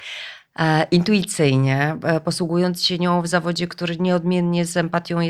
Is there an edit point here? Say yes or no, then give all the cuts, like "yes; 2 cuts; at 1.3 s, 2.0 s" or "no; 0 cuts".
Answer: no; 0 cuts